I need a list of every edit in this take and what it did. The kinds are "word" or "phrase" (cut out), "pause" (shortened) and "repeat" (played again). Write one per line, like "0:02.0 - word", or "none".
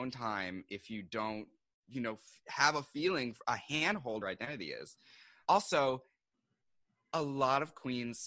0:01.6 - pause
0:03.4 - word
0:04.2 - phrase
0:05.4 - word